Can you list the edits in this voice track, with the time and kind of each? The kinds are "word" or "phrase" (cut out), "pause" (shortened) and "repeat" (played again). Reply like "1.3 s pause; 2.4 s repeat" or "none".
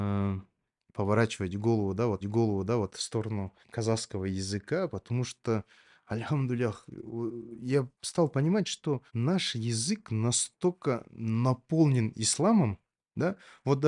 2.2 s repeat; 3.6 s pause; 7.9 s pause; 9.1 s pause